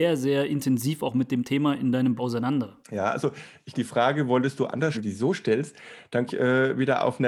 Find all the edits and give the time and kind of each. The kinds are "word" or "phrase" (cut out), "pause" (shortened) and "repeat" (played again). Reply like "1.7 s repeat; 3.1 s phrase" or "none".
2.2 s word; 2.8 s pause; 3.7 s word; 4.9 s phrase; 6.3 s word

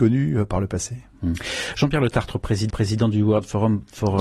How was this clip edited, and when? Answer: 2.7 s repeat

